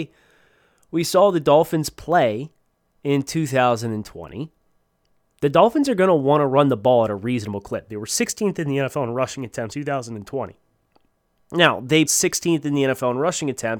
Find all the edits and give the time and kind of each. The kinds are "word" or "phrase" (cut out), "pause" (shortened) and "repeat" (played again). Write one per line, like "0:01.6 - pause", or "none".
0:09.7 - word
0:12.1 - word